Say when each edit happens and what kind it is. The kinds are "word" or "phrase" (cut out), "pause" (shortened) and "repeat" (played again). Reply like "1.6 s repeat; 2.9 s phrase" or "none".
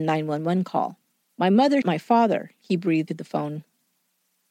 1.2 s pause; 1.8 s word; 3.1 s word